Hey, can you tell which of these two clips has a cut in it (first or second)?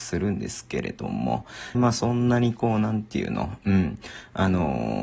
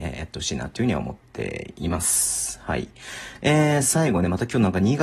first